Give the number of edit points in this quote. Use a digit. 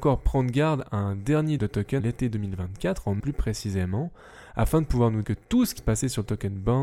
5